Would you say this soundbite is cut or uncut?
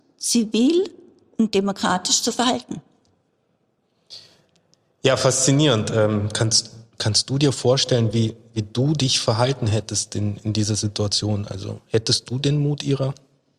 uncut